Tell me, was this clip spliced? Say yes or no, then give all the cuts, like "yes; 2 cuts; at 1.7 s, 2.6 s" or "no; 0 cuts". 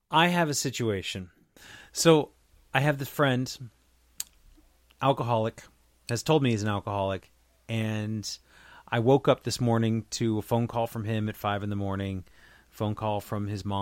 no; 0 cuts